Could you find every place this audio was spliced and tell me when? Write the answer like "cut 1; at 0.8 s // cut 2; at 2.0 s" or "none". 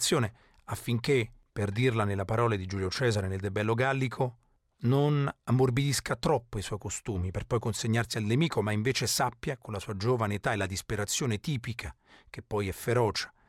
none